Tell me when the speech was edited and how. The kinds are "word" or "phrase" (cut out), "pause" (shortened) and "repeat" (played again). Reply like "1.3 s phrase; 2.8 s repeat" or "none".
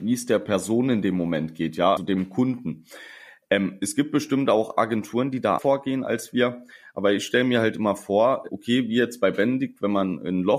2.0 s word; 5.6 s word; 8.5 s word